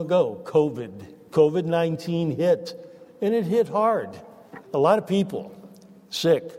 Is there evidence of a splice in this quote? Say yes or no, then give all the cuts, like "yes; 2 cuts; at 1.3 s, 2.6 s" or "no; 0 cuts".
yes; 1 cut; at 4.6 s